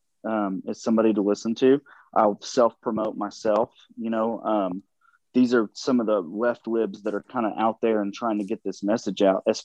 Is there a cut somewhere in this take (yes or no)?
no